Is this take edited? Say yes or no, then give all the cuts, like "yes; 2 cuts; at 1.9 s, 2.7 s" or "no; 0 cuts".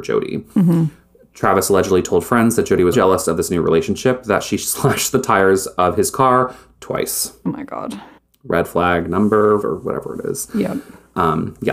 yes; 3 cuts; at 2.9 s, 8.2 s, 9.6 s